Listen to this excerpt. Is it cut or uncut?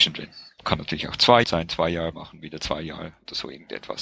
cut